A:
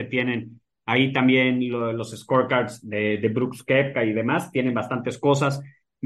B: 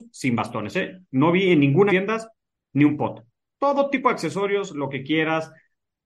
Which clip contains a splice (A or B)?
B